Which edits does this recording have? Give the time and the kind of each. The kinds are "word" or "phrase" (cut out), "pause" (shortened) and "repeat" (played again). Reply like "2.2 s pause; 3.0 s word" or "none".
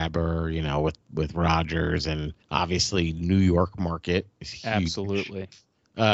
2.4 s pause